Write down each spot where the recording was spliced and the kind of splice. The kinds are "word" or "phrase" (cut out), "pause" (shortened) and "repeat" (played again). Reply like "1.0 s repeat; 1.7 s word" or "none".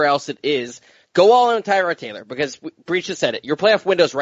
none